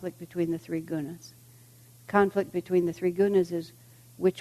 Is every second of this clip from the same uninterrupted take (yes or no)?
yes